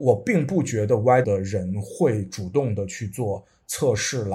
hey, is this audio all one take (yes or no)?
no